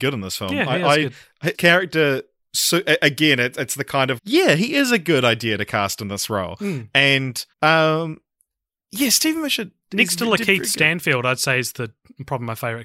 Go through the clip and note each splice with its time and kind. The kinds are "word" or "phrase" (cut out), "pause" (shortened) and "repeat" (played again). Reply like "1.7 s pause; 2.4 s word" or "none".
1.5 s word; 2.4 s pause; 4.2 s word; 7.5 s pause